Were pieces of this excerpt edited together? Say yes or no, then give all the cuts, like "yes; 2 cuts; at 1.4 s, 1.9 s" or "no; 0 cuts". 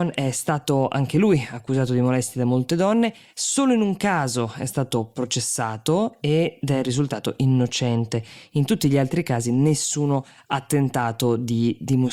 no; 0 cuts